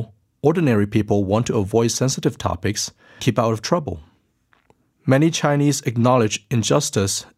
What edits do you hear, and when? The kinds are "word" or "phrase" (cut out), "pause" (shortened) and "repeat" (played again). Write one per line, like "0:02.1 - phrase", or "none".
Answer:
0:03.2 - word